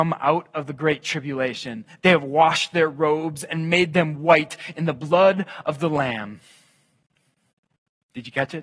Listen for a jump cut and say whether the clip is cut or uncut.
uncut